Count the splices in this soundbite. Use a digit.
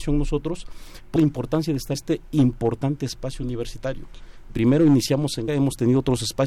4